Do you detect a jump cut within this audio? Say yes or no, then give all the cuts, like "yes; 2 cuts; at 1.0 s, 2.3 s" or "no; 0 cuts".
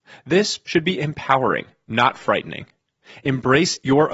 no; 0 cuts